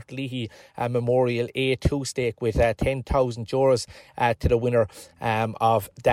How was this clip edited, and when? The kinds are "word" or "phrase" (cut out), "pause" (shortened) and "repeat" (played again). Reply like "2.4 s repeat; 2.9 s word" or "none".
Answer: none